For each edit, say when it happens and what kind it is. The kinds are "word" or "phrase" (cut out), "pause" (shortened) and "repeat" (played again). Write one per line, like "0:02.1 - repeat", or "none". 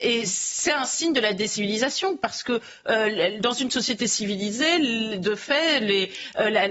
none